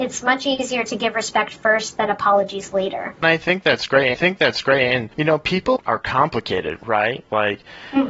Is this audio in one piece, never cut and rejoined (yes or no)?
no